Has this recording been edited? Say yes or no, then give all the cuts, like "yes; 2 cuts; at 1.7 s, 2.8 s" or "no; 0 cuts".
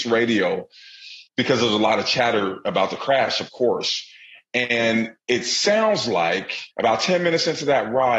yes; 2 cuts; at 1.3 s, 6.7 s